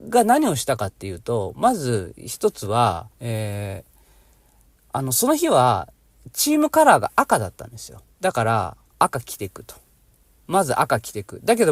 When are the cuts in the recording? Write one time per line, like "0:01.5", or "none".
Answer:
0:03.1
0:08.1
0:08.9